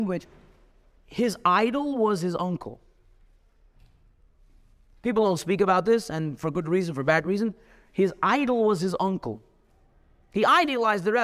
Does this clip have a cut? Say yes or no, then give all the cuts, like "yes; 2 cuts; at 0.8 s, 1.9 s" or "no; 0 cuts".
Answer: no; 0 cuts